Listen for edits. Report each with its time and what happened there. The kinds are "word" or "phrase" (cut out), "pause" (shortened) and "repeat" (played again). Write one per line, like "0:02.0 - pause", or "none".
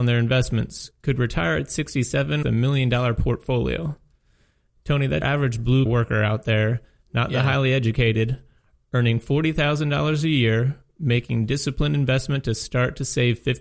0:02.4 - word
0:05.2 - word
0:05.9 - word